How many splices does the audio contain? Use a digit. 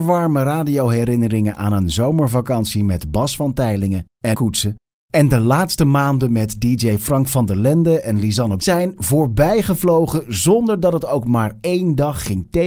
2